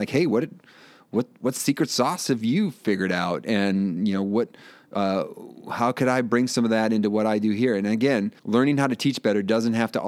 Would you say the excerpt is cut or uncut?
cut